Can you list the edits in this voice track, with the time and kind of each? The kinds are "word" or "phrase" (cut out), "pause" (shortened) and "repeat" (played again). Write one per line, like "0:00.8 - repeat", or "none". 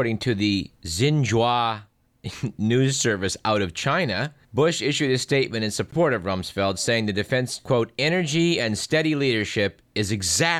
0:04.4 - pause
0:07.6 - word